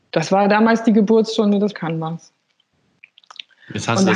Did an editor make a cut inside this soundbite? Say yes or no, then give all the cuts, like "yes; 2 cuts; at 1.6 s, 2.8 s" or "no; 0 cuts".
yes; 1 cut; at 1.7 s